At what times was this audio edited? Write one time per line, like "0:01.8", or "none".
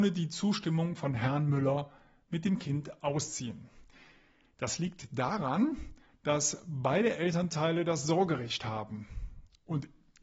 none

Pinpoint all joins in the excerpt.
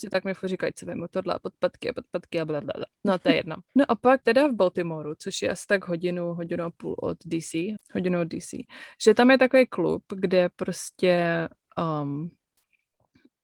0:02.9
0:03.7
0:04.2
0:07.8

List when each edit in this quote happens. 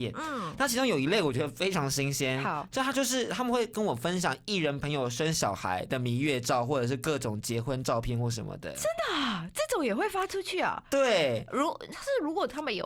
none

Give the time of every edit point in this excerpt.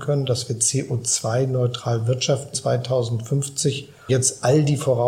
0:02.5
0:04.1

